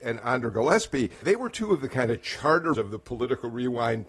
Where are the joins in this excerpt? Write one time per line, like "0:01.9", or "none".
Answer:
0:01.2
0:02.7